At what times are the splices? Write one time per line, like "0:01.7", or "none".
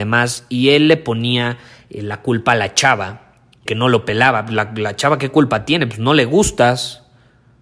0:03.7